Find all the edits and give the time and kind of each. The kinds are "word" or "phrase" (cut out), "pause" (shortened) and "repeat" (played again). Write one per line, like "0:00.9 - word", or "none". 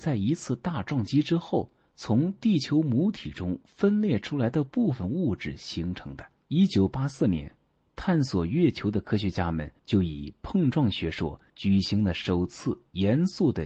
0:09.8 - pause
0:11.5 - pause